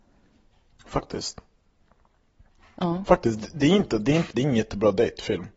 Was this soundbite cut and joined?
yes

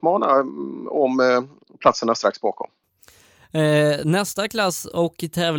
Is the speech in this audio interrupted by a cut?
no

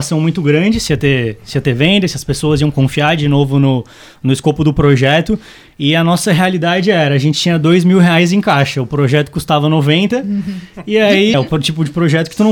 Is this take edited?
yes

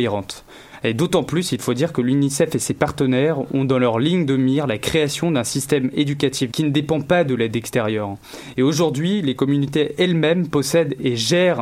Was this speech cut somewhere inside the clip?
yes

